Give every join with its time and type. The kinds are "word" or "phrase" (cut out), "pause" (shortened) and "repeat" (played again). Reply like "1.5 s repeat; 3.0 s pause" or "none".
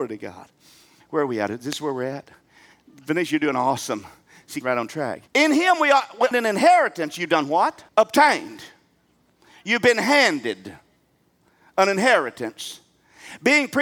4.6 s word; 5.3 s pause; 6.3 s phrase; 7.9 s pause